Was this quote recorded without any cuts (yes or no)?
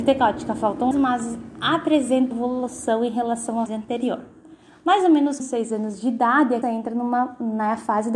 no